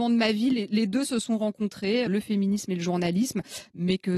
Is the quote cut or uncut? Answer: cut